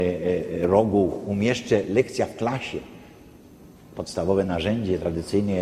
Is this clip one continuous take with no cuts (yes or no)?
yes